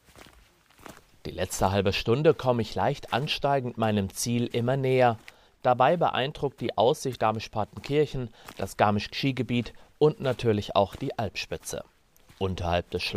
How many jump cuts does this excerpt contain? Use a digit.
2